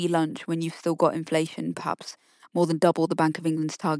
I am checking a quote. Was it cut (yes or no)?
no